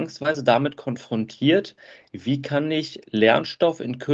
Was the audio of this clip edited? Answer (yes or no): no